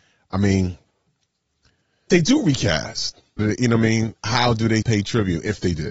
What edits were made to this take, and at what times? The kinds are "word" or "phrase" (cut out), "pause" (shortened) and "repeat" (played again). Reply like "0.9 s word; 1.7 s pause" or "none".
2.1 s word; 3.4 s word; 4.2 s word; 4.8 s word